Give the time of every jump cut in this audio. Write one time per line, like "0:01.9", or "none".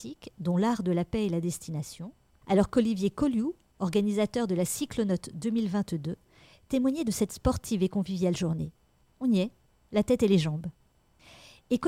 none